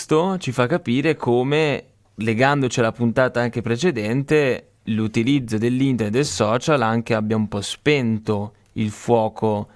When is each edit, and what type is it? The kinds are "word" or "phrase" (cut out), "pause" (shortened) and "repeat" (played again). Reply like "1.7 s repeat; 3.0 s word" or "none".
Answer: 2.0 s pause; 4.8 s pause